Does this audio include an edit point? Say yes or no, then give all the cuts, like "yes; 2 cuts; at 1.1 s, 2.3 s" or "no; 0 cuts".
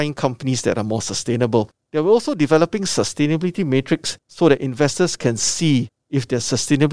no; 0 cuts